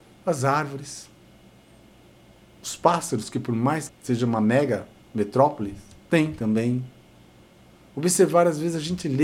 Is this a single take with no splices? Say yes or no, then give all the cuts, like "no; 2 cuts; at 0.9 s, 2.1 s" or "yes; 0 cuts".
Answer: no; 1 cut; at 3.9 s